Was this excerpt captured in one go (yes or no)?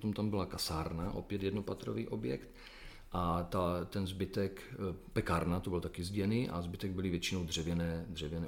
yes